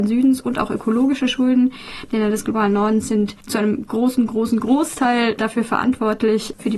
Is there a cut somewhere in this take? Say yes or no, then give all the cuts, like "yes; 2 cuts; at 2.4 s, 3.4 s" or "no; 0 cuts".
no; 0 cuts